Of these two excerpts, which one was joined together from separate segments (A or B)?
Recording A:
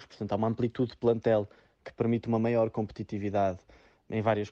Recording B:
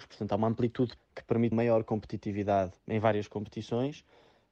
B